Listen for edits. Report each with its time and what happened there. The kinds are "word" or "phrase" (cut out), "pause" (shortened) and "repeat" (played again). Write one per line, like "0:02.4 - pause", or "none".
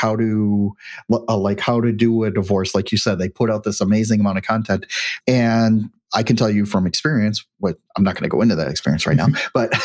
0:05.2 - pause

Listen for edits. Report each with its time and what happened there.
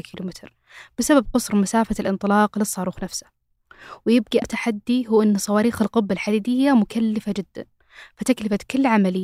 0:04.4 - word

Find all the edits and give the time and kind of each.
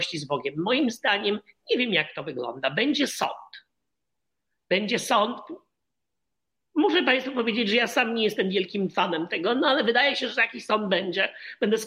none

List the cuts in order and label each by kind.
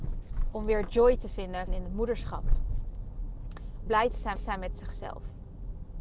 0:01.7 - word
0:03.9 - word
0:04.4 - repeat

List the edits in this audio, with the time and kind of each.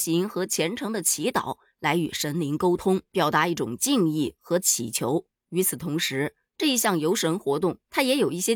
none

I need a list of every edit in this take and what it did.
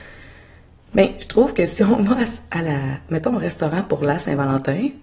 none

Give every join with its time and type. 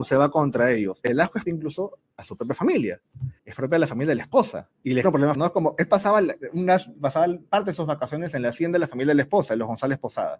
0:01.5 - word
0:03.4 - pause
0:04.7 - pause
0:05.0 - word
0:05.3 - word

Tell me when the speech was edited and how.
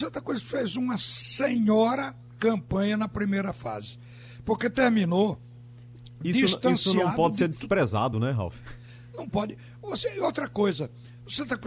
none

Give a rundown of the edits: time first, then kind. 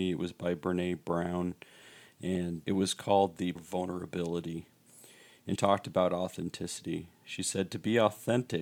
0:02.6 - word
0:03.6 - word
0:05.6 - word

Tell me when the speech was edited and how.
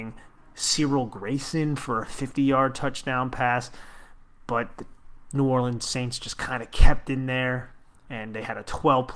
none

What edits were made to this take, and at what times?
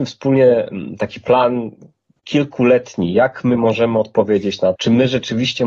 0:04.8 - word

